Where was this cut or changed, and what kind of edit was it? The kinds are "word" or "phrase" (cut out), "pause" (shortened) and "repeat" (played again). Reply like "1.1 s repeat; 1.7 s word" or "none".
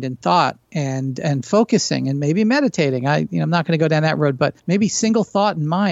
4.6 s pause